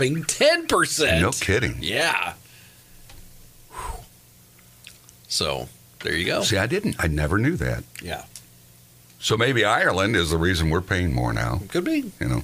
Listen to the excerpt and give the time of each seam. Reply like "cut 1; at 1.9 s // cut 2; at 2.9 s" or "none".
none